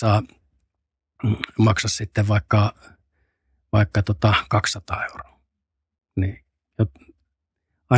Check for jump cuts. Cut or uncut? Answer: uncut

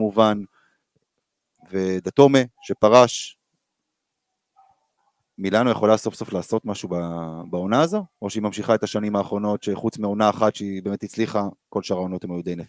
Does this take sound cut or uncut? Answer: uncut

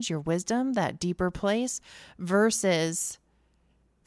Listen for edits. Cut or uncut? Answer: uncut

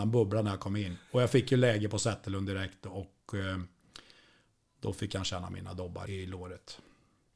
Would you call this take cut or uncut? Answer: cut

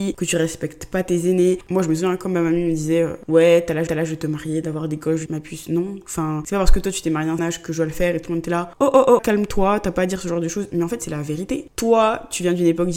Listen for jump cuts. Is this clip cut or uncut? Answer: cut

